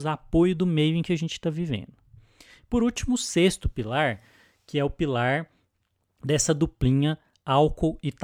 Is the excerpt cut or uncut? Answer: uncut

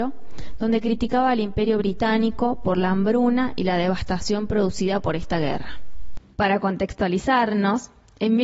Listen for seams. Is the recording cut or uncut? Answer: uncut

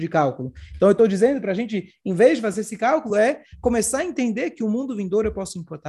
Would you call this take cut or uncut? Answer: uncut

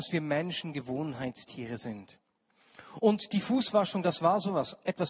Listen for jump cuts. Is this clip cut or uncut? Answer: uncut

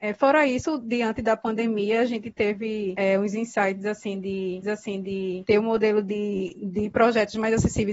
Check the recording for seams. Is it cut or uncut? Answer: cut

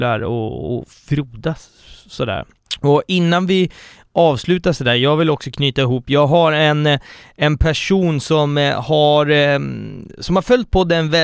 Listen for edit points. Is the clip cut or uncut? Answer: uncut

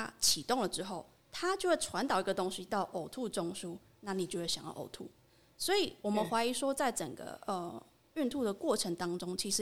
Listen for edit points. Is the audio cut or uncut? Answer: uncut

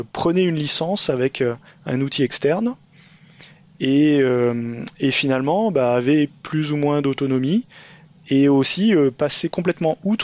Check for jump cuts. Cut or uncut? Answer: uncut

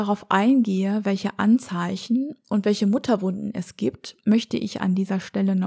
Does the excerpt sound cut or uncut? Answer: uncut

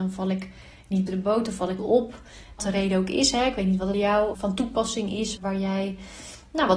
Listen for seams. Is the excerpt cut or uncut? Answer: cut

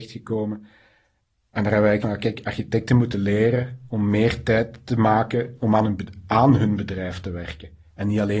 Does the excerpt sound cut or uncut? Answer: cut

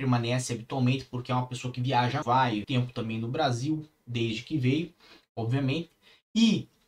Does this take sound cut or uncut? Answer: cut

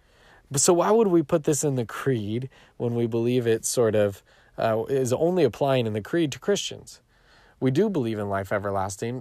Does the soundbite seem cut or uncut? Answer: uncut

